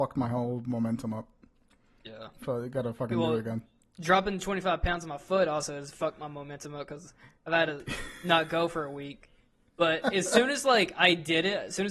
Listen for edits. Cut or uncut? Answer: uncut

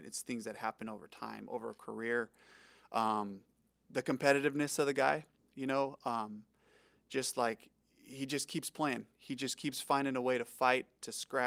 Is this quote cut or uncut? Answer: uncut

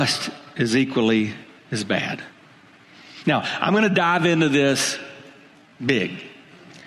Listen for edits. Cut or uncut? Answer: uncut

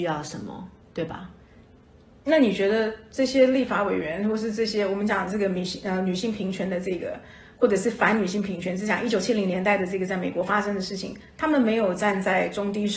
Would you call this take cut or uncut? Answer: uncut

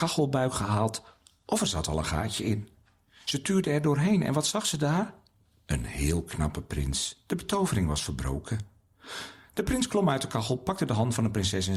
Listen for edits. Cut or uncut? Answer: uncut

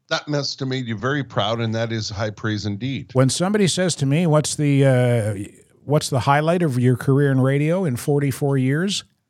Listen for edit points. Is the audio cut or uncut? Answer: uncut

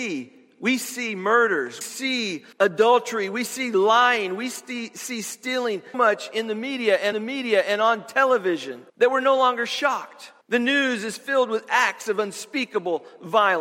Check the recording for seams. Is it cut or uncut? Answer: cut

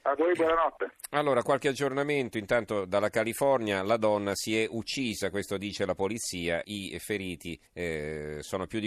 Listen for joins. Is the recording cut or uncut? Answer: cut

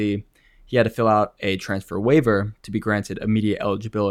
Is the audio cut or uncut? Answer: uncut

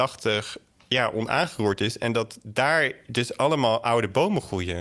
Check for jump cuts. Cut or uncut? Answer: uncut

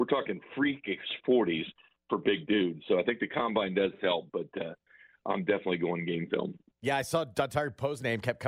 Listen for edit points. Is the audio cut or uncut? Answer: uncut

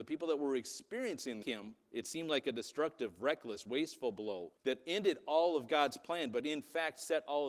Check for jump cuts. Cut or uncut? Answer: cut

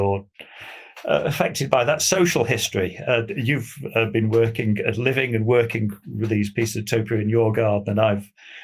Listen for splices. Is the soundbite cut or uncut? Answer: uncut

